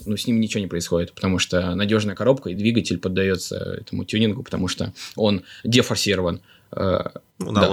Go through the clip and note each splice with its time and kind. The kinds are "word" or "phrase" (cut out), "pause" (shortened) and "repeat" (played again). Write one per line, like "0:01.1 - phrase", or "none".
none

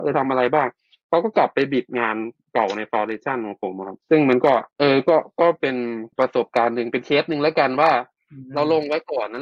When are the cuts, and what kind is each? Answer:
0:04.0 - pause
0:04.7 - pause
0:06.1 - pause

